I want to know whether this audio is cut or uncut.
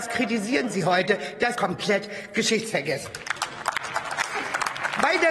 cut